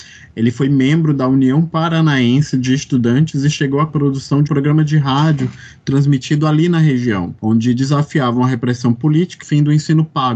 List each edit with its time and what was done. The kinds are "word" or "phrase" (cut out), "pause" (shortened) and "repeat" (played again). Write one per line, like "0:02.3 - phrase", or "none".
0:03.9 - phrase
0:04.5 - word
0:07.4 - pause
0:09.4 - phrase